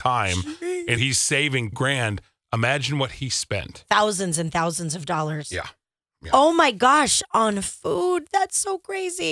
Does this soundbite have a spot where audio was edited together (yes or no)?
yes